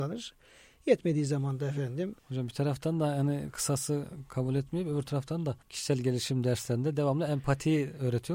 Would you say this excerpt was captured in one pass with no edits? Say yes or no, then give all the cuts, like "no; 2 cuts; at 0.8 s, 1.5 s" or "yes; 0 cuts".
no; 2 cuts; at 2.2 s, 5.6 s